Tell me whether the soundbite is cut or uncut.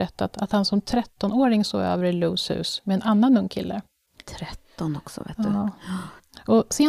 uncut